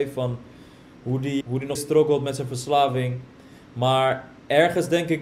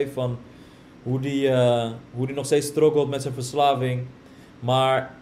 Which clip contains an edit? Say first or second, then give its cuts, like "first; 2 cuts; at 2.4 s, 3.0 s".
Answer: first; 2 cuts; at 1.4 s, 1.7 s